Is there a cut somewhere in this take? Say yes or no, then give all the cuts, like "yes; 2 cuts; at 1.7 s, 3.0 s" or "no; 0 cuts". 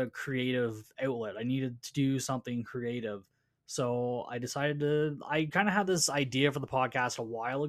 no; 0 cuts